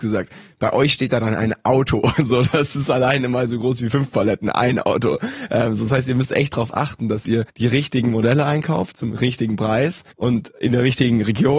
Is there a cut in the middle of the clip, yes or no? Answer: yes